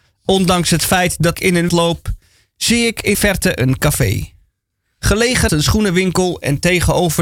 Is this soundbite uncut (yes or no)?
no